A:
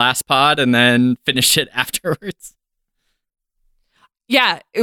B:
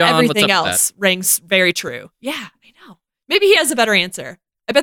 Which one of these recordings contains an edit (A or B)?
B